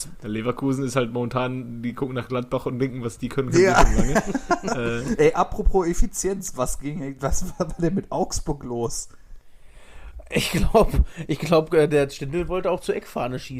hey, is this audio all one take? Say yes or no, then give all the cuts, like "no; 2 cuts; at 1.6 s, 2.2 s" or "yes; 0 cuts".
yes; 0 cuts